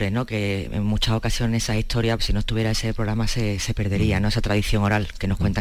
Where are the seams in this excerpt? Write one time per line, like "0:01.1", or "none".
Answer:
0:02.2